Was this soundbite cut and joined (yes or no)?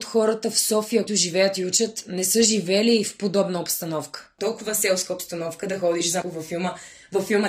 yes